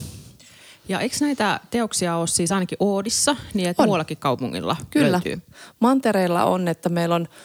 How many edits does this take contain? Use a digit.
0